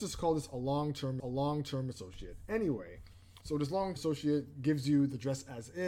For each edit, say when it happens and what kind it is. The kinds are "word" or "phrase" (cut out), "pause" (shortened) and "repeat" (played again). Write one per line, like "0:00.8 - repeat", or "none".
0:01.2 - repeat
0:03.4 - pause
0:04.0 - word